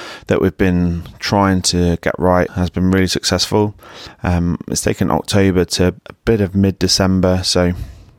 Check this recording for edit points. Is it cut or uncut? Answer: cut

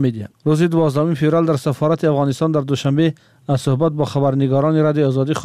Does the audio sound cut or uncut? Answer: uncut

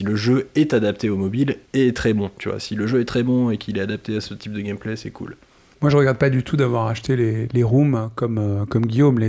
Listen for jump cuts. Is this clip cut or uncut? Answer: uncut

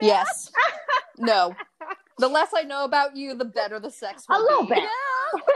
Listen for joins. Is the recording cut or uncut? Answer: uncut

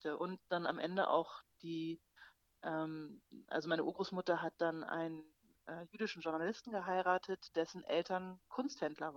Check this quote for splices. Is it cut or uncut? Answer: uncut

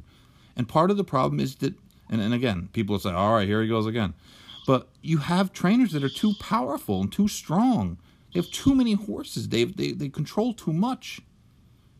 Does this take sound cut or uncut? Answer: uncut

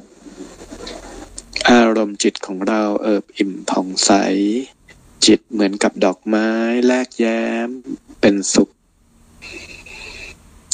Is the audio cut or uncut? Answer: uncut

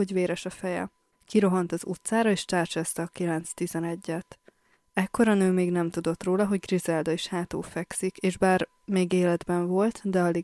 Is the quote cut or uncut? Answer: uncut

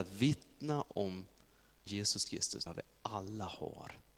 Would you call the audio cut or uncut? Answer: cut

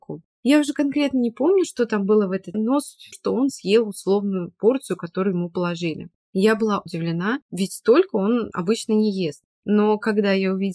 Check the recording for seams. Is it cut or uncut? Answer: cut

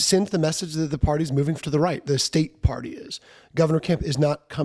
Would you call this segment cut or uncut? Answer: cut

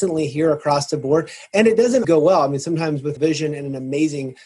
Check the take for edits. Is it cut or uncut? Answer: cut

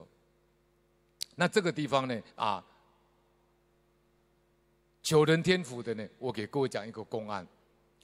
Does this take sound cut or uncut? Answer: cut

